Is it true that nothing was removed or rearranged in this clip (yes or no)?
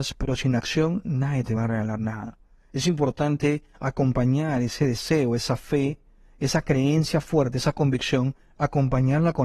yes